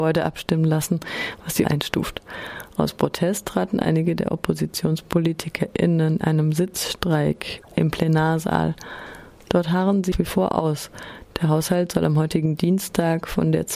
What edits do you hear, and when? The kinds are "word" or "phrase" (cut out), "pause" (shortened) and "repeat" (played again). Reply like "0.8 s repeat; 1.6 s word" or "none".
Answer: 1.6 s phrase; 6.2 s word; 10.1 s word